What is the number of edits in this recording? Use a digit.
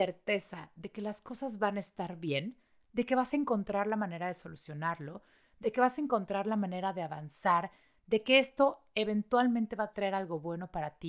0